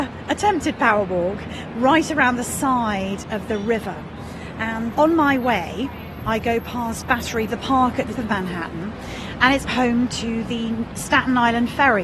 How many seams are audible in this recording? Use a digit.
4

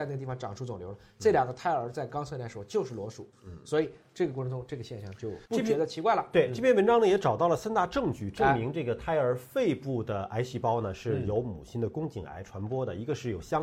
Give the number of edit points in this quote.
1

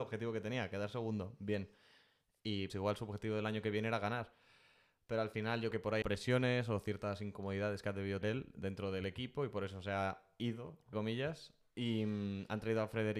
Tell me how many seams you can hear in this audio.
5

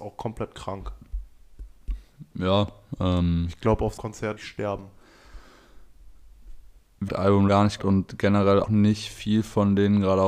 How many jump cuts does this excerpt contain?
6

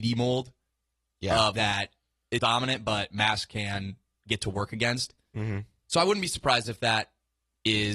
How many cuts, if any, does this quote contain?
2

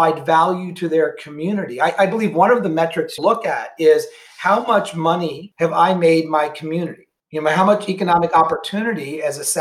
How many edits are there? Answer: 1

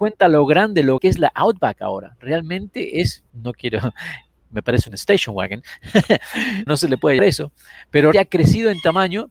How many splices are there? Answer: 5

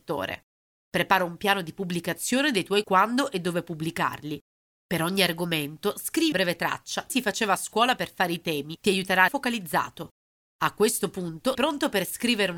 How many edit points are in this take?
5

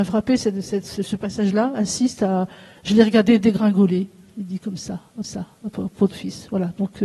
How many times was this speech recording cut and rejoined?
2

